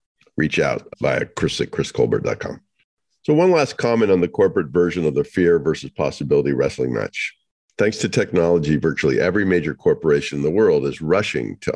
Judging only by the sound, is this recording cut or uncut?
uncut